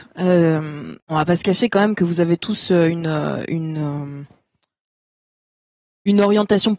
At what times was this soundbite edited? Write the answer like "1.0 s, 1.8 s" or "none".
1.0 s